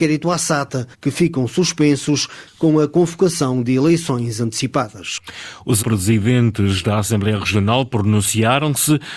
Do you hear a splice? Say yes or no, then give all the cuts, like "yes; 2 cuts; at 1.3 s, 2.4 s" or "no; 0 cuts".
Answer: yes; 2 cuts; at 0.9 s, 5.8 s